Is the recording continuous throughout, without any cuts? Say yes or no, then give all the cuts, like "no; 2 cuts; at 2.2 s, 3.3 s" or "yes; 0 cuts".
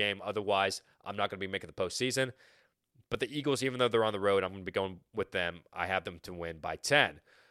yes; 0 cuts